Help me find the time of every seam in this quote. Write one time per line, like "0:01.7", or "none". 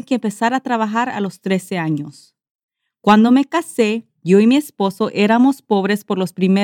none

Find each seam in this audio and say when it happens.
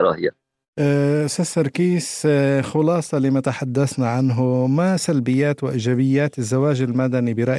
none

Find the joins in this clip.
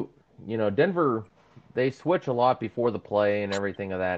none

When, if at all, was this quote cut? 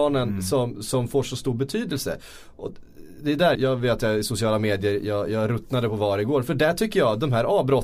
0:03.5

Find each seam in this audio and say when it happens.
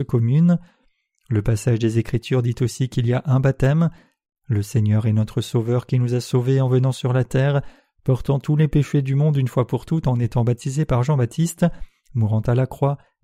none

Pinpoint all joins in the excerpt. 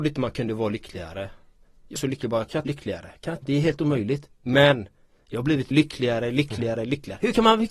0:02.0
0:02.7
0:03.4
0:05.7

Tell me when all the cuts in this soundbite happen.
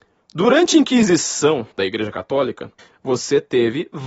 0:01.7
0:02.8

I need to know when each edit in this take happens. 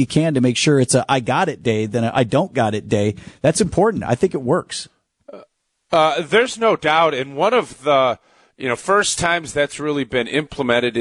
none

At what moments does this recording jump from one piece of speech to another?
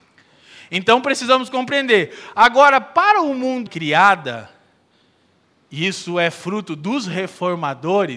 0:03.7

